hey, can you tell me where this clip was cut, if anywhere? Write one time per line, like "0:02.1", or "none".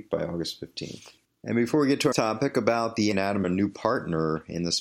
0:01.2
0:02.1
0:03.1
0:03.4